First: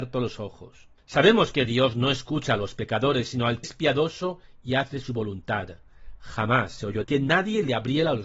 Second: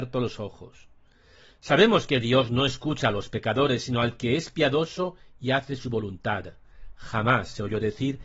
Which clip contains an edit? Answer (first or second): first